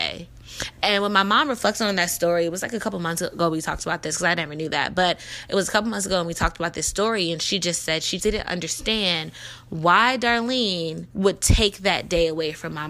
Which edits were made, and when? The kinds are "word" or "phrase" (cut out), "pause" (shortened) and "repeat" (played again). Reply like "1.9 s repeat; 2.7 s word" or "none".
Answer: 8.2 s word; 11.1 s pause

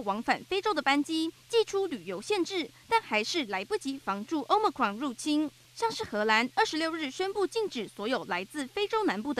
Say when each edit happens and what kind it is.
1.4 s pause

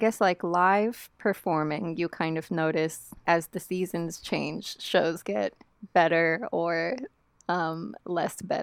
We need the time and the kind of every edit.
3.3 s word

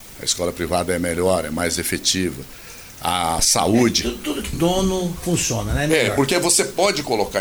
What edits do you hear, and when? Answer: 4.5 s word

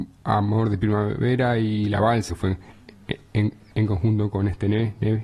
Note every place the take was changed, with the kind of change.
2.3 s word; 3.7 s word

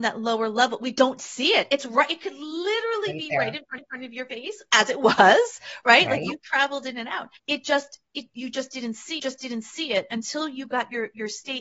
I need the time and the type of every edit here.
3.8 s repeat; 7.4 s pause; 9.2 s repeat

